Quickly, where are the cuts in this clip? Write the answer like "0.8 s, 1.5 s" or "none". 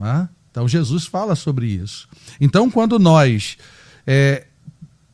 none